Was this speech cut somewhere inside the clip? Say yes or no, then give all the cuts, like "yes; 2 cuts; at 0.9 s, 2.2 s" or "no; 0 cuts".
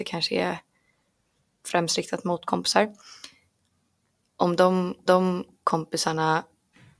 yes; 1 cut; at 5.1 s